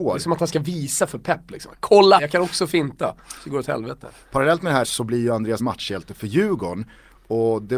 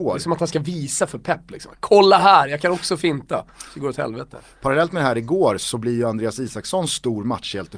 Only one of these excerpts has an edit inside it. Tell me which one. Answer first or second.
first